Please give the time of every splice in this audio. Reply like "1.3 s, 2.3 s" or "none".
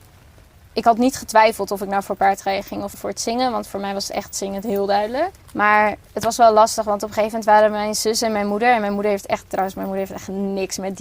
2.9 s, 5.4 s